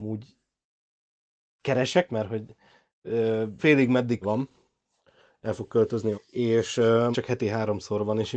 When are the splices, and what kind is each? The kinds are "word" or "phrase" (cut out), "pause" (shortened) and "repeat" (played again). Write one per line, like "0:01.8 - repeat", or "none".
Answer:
0:02.1 - word
0:03.6 - word
0:04.2 - word
0:06.1 - word
0:07.1 - word